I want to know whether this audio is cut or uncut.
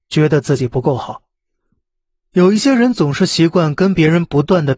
uncut